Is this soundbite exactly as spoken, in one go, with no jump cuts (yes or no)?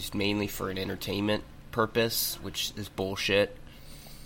yes